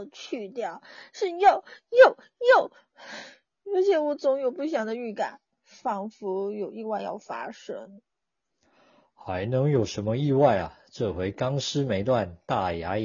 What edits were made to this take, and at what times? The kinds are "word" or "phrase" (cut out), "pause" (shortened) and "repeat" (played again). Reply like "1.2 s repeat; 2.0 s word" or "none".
none